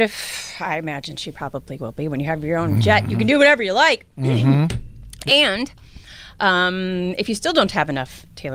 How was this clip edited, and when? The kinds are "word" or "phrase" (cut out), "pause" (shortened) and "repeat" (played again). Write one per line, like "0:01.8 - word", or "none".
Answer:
none